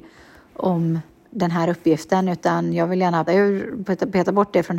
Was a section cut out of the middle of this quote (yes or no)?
yes